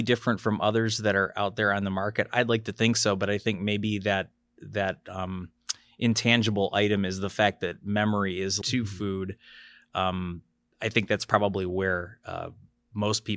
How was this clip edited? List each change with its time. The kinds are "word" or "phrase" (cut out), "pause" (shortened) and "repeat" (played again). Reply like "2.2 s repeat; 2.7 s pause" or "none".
8.6 s phrase